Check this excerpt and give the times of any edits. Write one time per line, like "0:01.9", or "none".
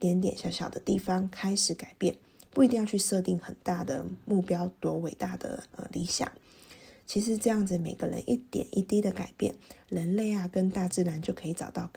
0:05.7